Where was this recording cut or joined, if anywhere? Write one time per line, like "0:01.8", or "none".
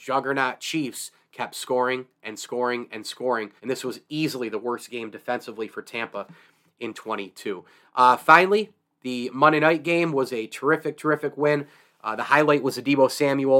0:03.6
0:06.9